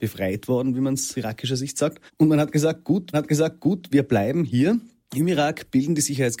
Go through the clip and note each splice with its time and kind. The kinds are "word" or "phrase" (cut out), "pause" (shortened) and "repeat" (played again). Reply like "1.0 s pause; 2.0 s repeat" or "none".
1.1 s word; 2.1 s pause; 3.1 s repeat